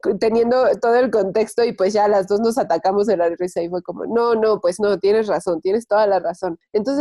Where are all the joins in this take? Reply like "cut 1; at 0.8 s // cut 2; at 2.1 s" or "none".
none